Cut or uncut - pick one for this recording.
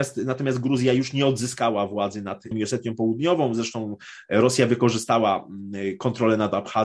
cut